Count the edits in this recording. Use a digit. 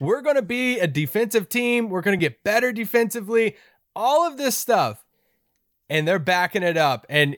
0